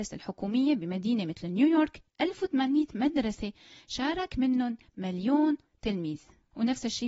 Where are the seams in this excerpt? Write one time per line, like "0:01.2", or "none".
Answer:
none